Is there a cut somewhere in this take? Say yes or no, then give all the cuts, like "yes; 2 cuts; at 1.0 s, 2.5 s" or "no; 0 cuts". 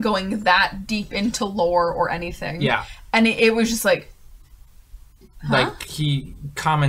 no; 0 cuts